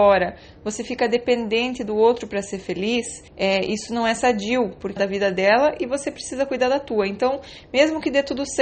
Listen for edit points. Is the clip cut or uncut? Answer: cut